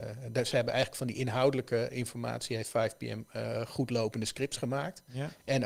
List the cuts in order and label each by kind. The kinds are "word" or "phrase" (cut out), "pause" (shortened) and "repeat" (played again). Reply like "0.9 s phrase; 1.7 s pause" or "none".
none